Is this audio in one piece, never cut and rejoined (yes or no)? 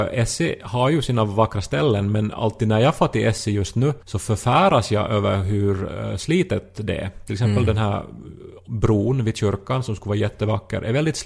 no